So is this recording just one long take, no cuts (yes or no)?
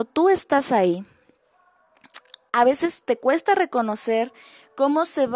yes